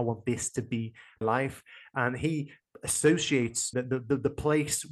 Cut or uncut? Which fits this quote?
cut